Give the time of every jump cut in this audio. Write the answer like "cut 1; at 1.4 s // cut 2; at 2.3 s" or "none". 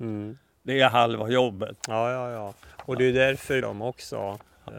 cut 1; at 3.6 s